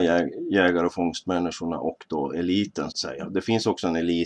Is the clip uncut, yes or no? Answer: no